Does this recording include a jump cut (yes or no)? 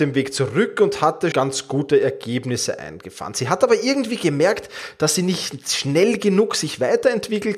yes